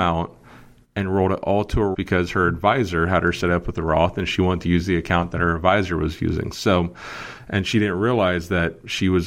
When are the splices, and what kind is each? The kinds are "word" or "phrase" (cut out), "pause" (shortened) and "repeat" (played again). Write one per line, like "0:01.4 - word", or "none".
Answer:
0:01.9 - word